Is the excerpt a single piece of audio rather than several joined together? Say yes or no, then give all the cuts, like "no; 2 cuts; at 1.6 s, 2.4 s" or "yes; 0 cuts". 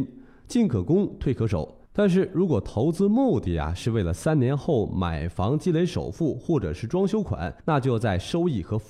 no; 2 cuts; at 1.8 s, 7.6 s